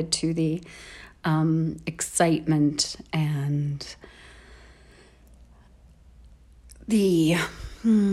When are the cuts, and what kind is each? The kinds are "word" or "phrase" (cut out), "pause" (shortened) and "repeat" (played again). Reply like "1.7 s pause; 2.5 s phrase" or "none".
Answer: none